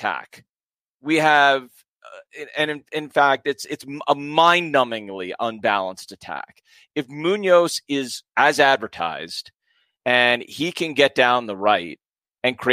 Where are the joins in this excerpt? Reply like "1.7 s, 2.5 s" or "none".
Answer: 8.3 s